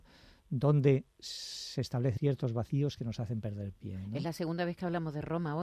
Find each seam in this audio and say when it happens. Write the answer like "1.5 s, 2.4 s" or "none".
1.1 s, 2.2 s